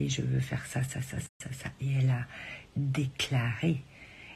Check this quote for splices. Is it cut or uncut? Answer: uncut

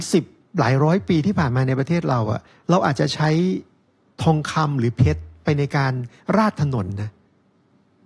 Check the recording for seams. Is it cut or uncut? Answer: uncut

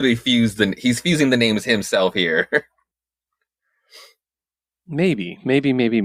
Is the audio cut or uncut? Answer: uncut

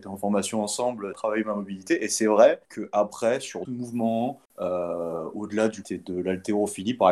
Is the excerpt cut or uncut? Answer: cut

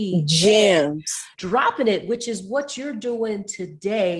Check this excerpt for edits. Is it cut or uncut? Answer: cut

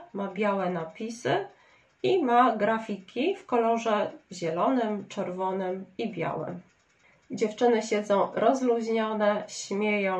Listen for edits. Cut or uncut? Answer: uncut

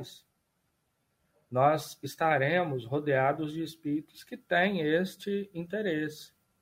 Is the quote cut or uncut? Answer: uncut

